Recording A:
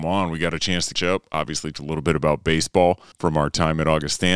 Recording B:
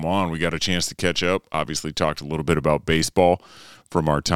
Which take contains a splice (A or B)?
A